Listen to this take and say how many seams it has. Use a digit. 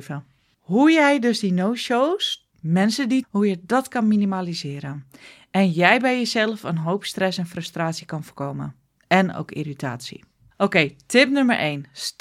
2